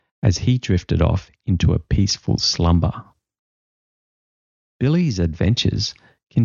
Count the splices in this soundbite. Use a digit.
0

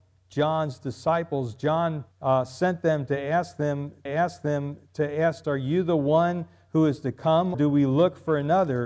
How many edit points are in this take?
4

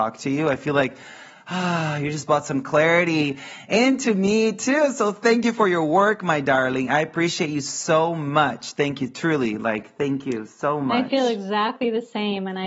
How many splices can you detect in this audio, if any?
0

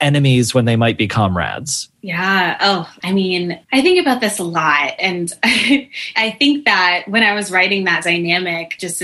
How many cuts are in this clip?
2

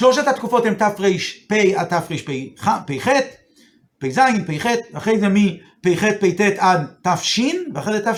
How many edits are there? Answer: 0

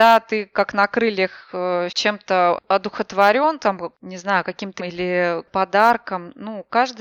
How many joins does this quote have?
4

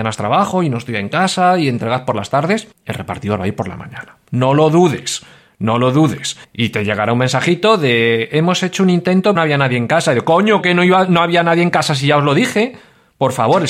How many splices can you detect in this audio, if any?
4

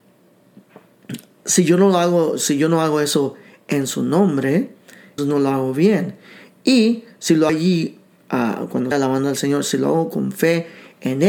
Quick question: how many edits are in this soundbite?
3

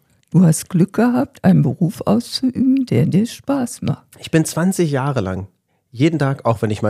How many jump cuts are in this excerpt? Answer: 0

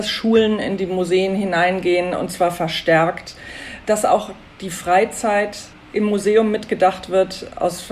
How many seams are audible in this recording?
0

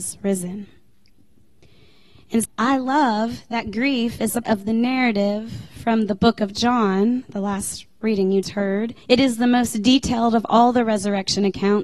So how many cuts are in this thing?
4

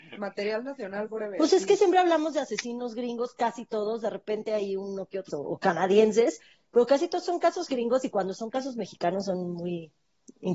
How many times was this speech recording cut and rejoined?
1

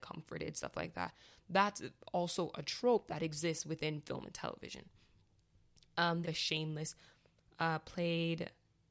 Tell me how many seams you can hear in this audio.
1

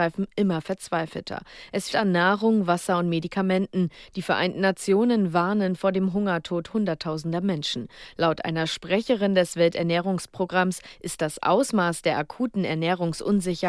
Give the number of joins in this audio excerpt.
1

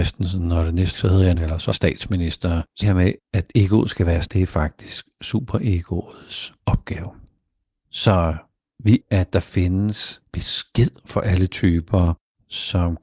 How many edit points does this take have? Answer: 8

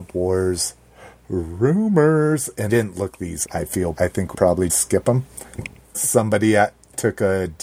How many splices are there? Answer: 6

